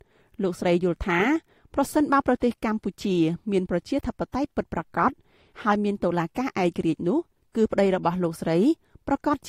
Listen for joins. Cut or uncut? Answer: uncut